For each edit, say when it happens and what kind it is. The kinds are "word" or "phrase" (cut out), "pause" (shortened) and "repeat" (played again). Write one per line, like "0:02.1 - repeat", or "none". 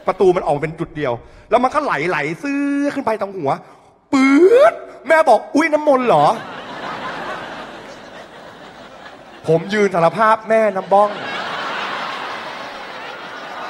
none